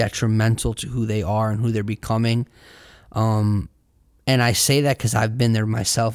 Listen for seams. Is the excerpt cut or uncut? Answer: uncut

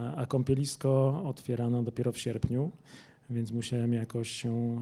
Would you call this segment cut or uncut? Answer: uncut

